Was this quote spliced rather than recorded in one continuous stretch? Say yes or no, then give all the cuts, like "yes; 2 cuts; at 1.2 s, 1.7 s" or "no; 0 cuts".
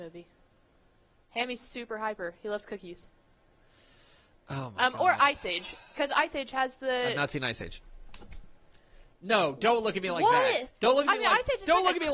no; 0 cuts